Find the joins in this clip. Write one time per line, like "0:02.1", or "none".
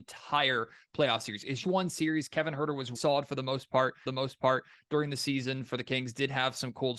0:01.6
0:03.0
0:04.1